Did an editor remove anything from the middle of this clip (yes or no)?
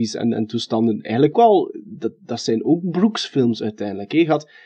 yes